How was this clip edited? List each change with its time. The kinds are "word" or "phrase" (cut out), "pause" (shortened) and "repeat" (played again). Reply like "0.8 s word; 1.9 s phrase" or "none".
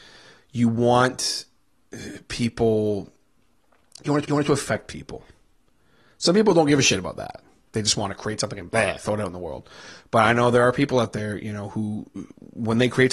4.2 s repeat